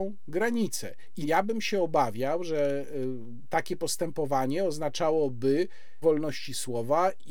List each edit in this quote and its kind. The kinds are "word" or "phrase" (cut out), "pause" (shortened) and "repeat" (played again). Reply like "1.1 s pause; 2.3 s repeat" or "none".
1.2 s word; 6.0 s word